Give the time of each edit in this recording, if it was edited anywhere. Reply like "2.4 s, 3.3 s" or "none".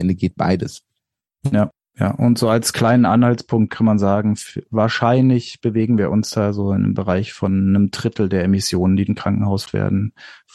9.1 s, 9.7 s